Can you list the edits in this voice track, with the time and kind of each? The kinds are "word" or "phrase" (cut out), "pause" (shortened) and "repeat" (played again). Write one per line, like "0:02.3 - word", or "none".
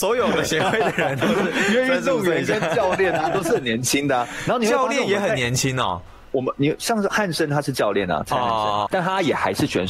0:08.9 - word